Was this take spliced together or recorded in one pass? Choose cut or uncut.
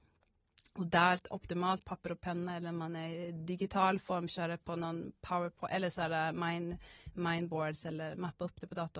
uncut